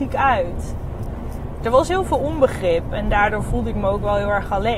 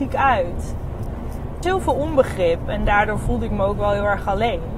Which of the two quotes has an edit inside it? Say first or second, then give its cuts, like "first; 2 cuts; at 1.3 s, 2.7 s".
second; 1 cut; at 1.6 s